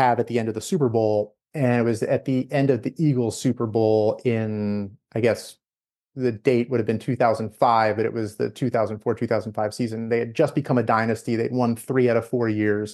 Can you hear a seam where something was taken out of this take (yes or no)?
no